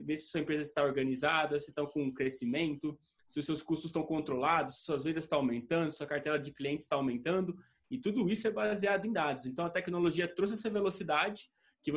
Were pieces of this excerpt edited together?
no; 0 cuts

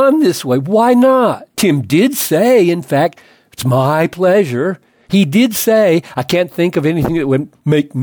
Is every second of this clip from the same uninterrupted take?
yes; 0 cuts

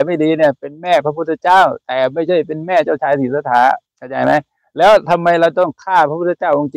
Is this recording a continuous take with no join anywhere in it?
no; 1 cut; at 3.9 s

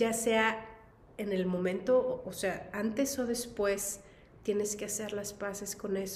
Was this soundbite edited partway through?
yes; 1 cut; at 4.3 s

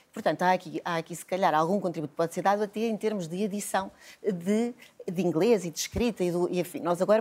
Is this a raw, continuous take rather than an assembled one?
yes; 0 cuts

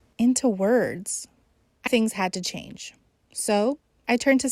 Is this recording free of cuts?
no; 1 cut; at 1.9 s

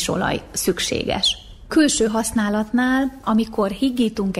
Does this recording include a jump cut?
no; 0 cuts

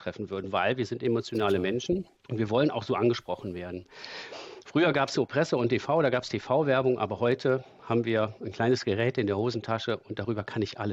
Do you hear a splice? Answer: yes; 1 cut; at 2.2 s

